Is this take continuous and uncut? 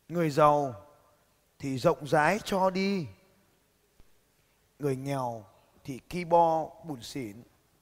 yes; 0 cuts

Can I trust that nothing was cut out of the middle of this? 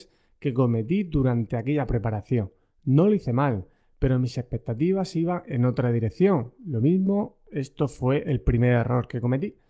no; 1 cut; at 2.6 s

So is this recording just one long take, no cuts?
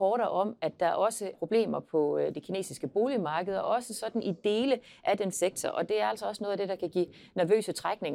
no; 2 cuts; at 1.3 s, 5.3 s

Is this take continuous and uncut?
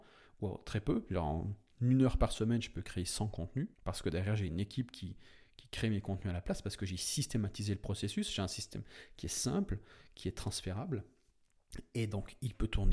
no; 1 cut; at 3.7 s

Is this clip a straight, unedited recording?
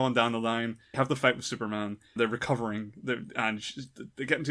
no; 2 cuts; at 0.9 s, 2.2 s

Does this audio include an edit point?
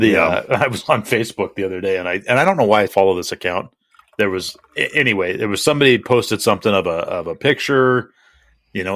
yes; 3 cuts; at 2.9 s, 4.0 s, 4.6 s

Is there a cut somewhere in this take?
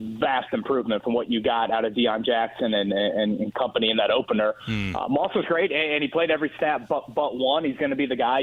no; 0 cuts

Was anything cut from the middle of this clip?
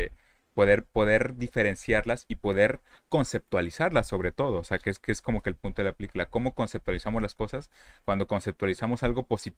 no; 0 cuts

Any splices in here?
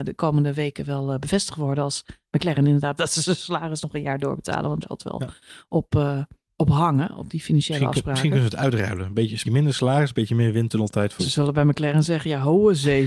yes; 4 cuts; at 3.0 s, 4.8 s, 9.4 s, 11.2 s

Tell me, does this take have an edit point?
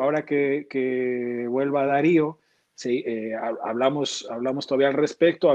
no; 0 cuts

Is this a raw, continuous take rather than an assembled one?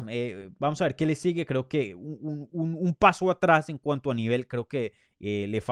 yes; 0 cuts

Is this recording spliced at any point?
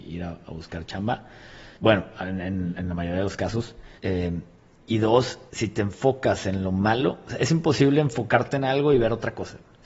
yes; 3 cuts; at 1.7 s, 4.0 s, 5.5 s

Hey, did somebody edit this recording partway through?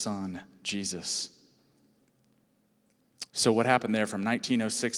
yes; 1 cut; at 3.3 s

